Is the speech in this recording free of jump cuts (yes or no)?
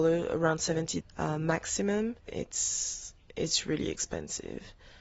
no